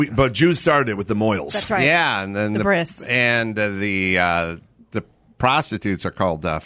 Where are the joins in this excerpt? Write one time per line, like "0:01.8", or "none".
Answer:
none